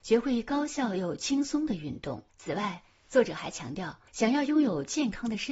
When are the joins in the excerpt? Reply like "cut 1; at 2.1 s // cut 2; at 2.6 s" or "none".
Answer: cut 1; at 2.3 s // cut 2; at 4.1 s